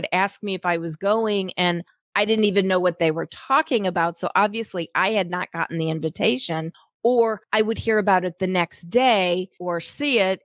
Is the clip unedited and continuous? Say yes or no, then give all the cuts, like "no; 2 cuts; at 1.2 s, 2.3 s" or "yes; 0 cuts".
yes; 0 cuts